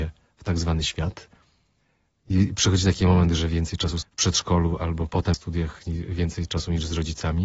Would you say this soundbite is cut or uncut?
cut